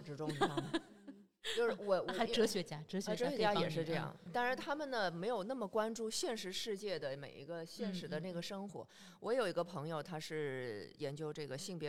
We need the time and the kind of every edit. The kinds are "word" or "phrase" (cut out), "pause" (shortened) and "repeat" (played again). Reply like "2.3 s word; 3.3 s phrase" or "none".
4.3 s word